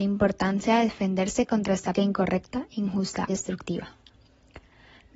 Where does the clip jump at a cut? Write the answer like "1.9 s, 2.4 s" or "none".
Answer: 1.9 s, 3.3 s